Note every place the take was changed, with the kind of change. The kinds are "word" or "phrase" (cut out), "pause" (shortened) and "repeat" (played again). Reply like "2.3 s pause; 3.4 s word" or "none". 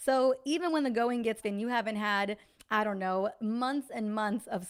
1.4 s word